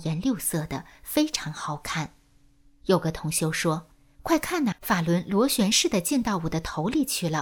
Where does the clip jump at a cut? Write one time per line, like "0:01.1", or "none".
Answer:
0:03.9
0:04.7